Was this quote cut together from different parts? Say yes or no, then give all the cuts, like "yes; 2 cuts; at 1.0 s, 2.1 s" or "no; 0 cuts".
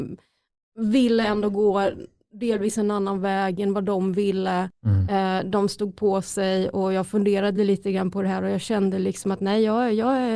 no; 0 cuts